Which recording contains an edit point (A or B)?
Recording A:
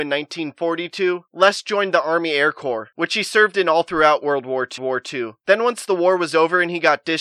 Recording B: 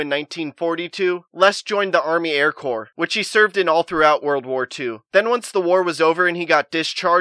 A